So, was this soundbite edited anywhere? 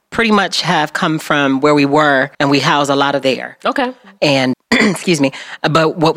yes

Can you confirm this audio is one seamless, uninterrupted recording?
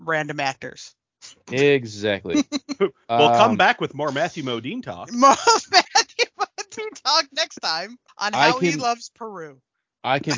no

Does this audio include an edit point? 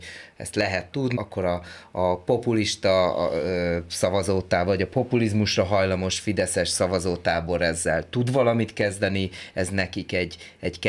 yes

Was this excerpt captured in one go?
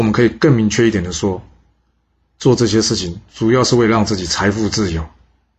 yes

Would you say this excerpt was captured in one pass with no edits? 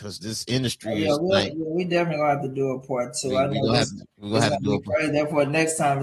no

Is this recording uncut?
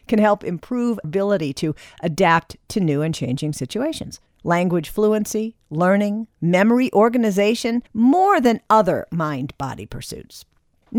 no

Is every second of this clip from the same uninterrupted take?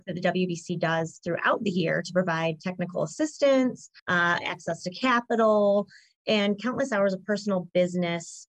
no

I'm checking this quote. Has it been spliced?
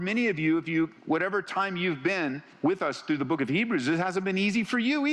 yes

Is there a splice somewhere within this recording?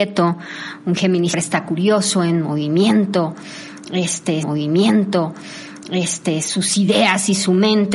yes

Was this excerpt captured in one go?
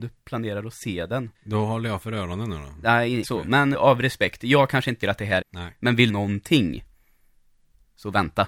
no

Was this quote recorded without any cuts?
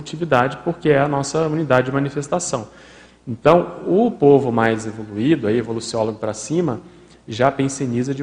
yes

